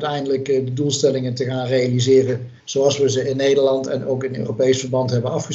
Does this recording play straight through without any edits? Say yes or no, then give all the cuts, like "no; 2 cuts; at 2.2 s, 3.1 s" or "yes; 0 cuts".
no; 1 cut; at 2.6 s